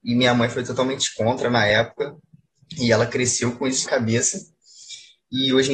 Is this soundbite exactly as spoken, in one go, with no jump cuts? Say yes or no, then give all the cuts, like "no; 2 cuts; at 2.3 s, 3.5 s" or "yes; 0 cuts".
no; 1 cut; at 3.9 s